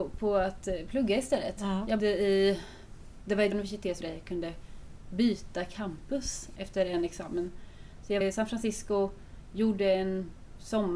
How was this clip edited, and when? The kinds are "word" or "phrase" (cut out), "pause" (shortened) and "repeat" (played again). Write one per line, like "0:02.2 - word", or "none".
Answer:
0:02.0 - word
0:03.5 - word
0:04.0 - word
0:06.6 - word
0:08.2 - word